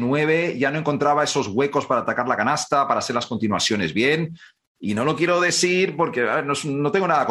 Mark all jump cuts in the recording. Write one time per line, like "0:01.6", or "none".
none

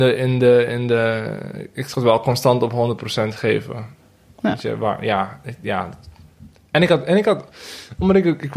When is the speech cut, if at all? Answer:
none

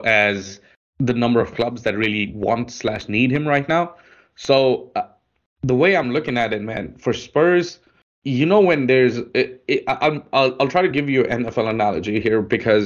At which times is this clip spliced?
none

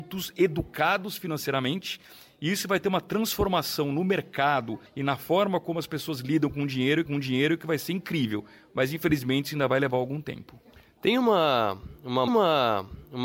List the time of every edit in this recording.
0:04.9
0:07.1
0:12.3

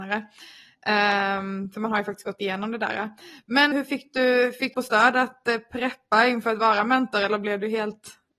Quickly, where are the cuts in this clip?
0:03.7
0:04.7

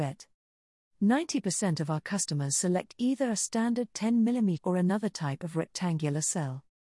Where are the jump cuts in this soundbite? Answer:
0:04.6

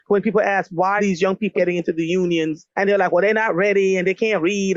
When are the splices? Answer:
0:01.0
0:01.5
0:02.7

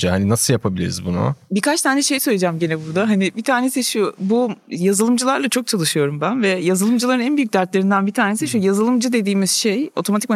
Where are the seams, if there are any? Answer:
none

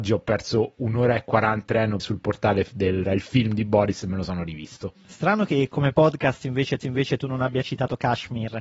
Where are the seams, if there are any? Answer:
0:01.7
0:02.0
0:03.1
0:06.8

